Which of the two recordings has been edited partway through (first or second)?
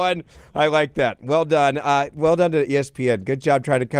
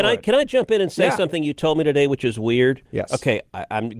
second